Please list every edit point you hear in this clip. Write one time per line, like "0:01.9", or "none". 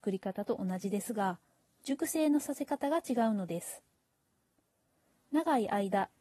none